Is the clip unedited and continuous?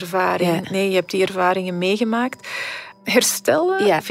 yes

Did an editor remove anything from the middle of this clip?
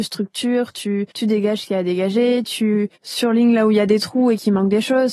yes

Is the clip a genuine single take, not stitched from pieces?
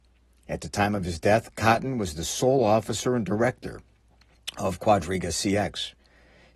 yes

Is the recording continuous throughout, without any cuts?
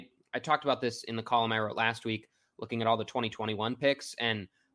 yes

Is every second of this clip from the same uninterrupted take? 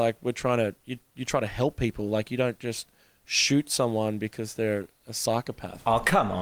yes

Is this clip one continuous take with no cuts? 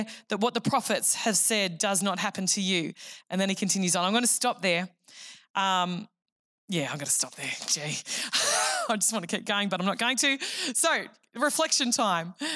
yes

